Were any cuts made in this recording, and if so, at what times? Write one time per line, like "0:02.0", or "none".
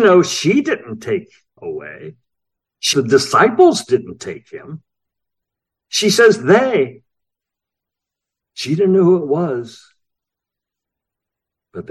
0:01.6
0:02.9